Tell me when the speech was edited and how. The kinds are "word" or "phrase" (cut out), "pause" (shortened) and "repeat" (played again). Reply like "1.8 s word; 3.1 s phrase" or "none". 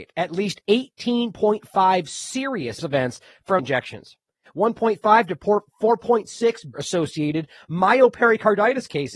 2.8 s word; 3.6 s word; 4.5 s word; 6.7 s word